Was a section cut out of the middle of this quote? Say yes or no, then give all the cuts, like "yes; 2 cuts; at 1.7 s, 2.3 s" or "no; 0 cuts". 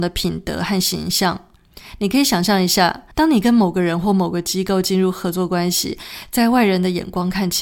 yes; 1 cut; at 3.1 s